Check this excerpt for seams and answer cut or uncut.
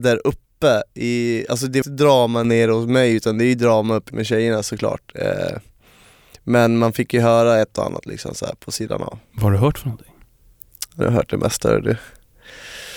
cut